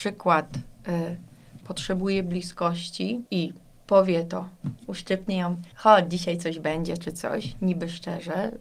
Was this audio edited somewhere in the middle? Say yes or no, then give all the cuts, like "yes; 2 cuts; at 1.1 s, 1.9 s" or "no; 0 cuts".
yes; 4 cuts; at 1.6 s, 3.3 s, 4.8 s, 5.7 s